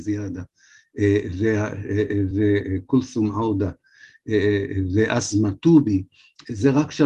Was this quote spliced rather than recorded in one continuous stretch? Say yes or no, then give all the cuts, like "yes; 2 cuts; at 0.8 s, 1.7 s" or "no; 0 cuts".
no; 0 cuts